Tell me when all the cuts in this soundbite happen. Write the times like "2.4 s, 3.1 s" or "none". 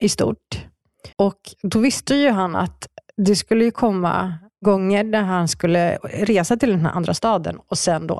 1.1 s